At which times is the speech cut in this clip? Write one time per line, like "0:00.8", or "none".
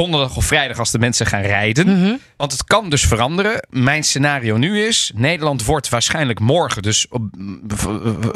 none